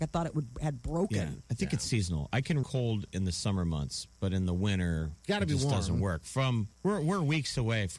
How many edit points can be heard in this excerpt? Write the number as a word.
three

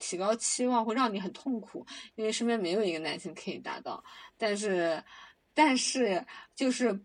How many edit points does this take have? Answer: zero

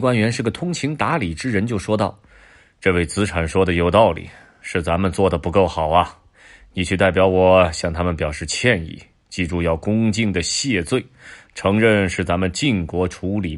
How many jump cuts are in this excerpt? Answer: zero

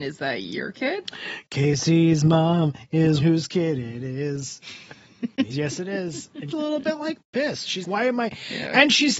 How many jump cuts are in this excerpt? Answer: four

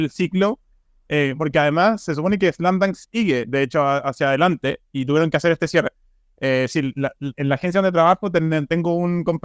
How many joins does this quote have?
one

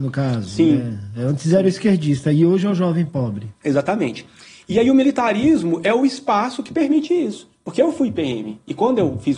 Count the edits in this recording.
one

